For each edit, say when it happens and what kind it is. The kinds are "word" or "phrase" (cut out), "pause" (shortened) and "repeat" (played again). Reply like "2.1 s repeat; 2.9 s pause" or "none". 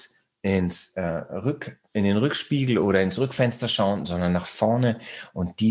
none